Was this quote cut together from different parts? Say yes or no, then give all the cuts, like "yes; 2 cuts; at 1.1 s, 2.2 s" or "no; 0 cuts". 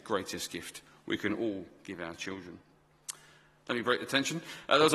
no; 0 cuts